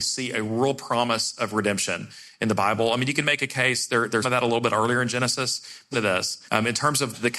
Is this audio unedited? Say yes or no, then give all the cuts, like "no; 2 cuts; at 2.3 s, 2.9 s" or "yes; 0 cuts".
no; 3 cuts; at 4.2 s, 5.9 s, 6.5 s